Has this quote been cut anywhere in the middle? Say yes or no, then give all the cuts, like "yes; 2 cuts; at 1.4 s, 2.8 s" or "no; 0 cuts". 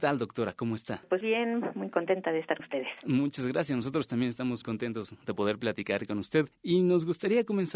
yes; 3 cuts; at 1.2 s, 2.6 s, 4.6 s